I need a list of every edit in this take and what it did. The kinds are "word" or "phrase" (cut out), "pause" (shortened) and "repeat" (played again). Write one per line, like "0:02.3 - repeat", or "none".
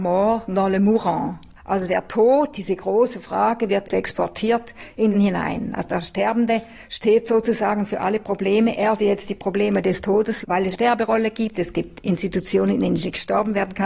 0:01.6 - pause
0:03.8 - word
0:05.1 - phrase
0:09.0 - word
0:10.4 - word
0:10.7 - word